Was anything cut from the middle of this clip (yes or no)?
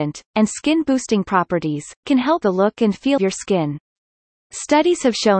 yes